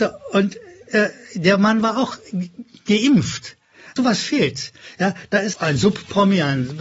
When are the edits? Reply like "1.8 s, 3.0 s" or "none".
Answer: 4.0 s, 5.5 s